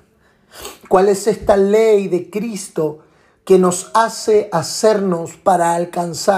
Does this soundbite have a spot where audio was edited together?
no; 0 cuts

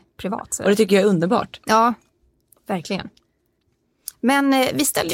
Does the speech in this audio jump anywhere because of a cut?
no; 0 cuts

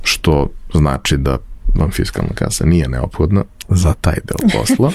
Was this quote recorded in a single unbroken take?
yes; 0 cuts

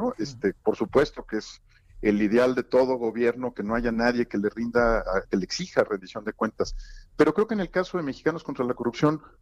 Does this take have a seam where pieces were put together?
no; 0 cuts

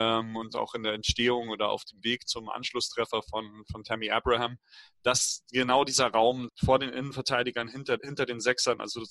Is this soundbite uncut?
no; 3 cuts; at 2.2 s, 6.5 s, 8.0 s

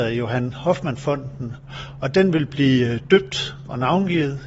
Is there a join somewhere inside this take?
no; 0 cuts

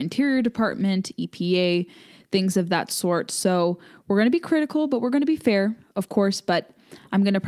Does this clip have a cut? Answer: no; 0 cuts

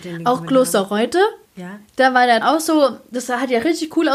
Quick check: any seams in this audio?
yes; 2 cuts; at 1.5 s, 2.4 s

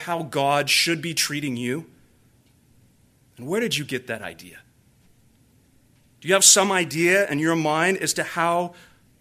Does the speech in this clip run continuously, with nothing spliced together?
yes; 0 cuts

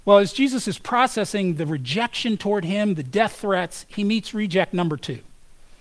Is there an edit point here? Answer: no; 0 cuts

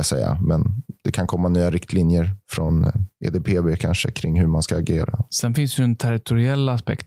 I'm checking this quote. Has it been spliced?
no; 0 cuts

